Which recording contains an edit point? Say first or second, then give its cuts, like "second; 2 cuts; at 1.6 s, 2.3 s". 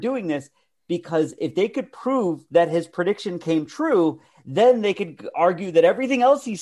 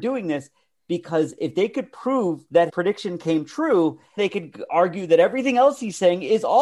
second; 2 cuts; at 2.7 s, 4.2 s